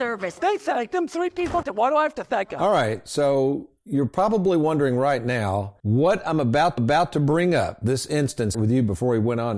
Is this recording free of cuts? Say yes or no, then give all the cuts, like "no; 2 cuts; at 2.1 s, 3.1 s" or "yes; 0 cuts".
no; 4 cuts; at 1.6 s, 5.8 s, 6.8 s, 8.5 s